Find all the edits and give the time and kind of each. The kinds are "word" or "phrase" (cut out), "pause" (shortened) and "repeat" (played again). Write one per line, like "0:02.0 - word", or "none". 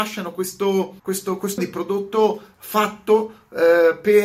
0:01.0 - pause
0:01.6 - word